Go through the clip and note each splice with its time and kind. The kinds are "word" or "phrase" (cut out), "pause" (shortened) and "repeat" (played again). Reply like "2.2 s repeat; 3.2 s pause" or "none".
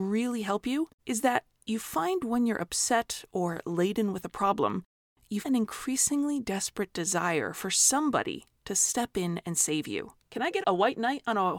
1.0 s pause; 5.4 s word; 10.2 s pause; 10.6 s word